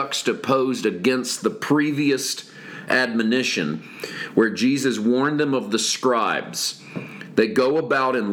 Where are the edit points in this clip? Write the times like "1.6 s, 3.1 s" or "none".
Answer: none